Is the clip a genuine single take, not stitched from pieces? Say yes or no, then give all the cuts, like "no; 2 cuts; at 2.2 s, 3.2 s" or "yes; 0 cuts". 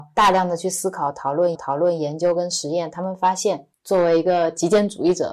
no; 1 cut; at 1.5 s